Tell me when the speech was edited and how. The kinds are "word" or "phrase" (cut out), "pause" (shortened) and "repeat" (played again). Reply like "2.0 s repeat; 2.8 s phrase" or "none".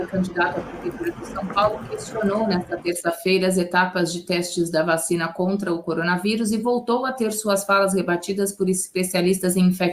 none